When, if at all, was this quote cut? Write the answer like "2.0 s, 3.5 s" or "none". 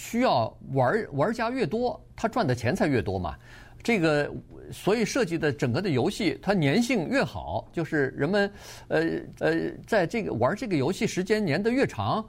9.4 s